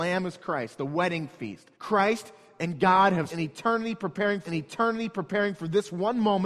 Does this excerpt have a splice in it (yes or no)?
yes